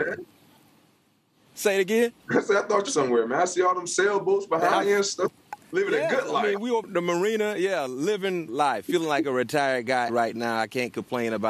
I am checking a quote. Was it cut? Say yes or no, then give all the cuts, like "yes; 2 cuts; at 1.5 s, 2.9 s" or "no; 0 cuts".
yes; 6 cuts; at 2.2 s, 2.9 s, 5.6 s, 6.8 s, 8.5 s, 10.1 s